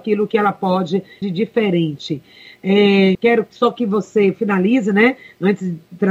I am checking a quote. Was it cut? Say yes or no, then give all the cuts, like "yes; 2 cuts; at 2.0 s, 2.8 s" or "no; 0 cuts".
yes; 2 cuts; at 1.2 s, 3.1 s